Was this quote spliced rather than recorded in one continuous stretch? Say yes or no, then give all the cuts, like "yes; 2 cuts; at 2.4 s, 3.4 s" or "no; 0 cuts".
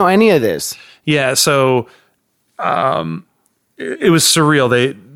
no; 0 cuts